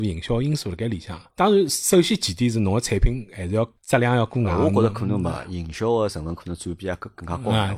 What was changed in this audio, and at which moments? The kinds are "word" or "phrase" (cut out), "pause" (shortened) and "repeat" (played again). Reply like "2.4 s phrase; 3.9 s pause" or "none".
1.3 s pause; 3.8 s pause